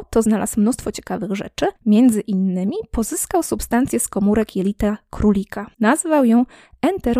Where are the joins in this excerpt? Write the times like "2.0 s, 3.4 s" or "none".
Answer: 1.8 s, 5.7 s